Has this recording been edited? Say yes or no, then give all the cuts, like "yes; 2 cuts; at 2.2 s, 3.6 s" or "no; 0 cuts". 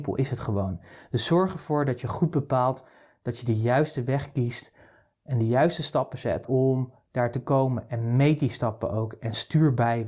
no; 0 cuts